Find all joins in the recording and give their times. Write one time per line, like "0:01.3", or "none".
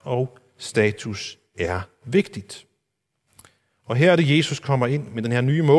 none